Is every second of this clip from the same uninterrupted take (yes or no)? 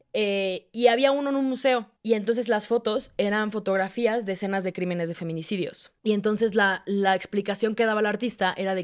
no